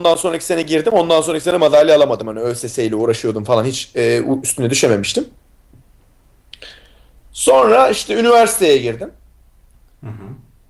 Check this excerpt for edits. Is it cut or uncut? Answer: uncut